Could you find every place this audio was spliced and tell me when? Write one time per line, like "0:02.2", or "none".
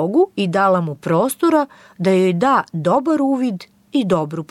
none